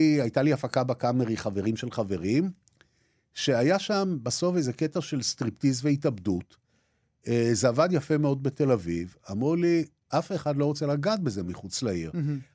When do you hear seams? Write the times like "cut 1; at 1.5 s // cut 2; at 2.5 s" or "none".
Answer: none